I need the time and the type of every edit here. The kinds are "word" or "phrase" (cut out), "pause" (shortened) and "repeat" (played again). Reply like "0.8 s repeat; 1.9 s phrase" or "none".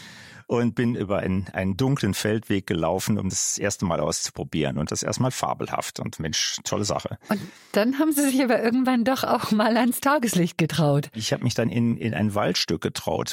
0.9 s word; 3.3 s word; 4.9 s word; 6.2 s word